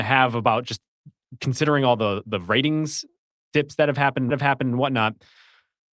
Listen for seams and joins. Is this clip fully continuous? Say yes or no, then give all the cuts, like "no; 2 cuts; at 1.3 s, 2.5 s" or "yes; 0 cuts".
no; 1 cut; at 4.3 s